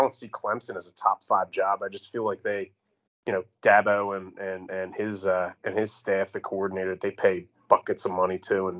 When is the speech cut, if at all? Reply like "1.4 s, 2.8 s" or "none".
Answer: 3.1 s, 5.6 s